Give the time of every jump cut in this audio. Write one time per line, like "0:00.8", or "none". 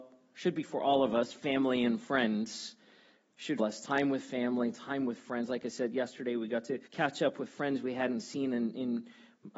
0:03.6
0:06.9